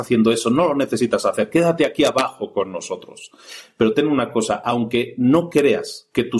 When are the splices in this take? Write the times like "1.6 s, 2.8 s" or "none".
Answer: none